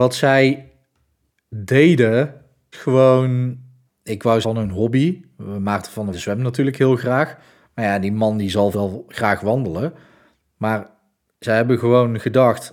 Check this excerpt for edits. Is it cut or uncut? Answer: cut